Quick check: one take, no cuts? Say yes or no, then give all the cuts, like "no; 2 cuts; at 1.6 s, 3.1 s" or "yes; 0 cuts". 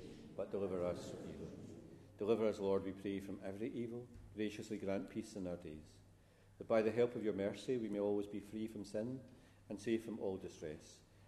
yes; 0 cuts